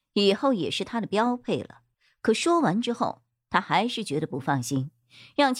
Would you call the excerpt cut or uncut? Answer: cut